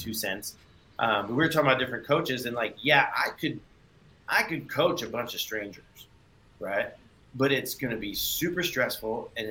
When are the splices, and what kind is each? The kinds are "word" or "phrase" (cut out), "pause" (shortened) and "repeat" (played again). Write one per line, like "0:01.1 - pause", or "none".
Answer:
none